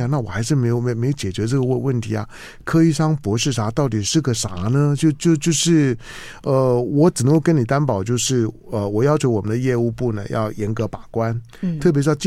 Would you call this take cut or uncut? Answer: uncut